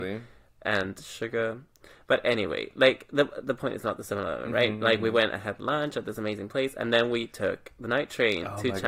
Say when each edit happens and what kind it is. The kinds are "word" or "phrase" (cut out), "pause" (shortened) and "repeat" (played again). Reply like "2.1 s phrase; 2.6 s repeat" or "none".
none